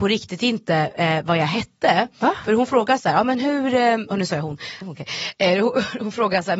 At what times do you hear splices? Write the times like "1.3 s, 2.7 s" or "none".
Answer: 4.8 s